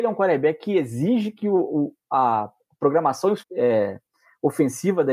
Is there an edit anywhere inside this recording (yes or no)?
yes